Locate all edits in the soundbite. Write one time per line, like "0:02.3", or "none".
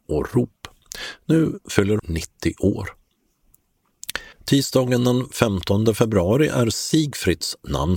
0:02.0
0:04.3